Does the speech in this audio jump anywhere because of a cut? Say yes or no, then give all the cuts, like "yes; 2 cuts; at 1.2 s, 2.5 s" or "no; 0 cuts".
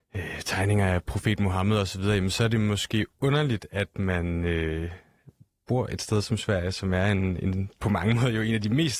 no; 0 cuts